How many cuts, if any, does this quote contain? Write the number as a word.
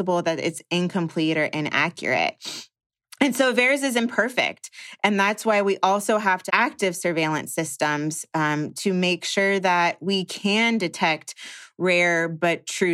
one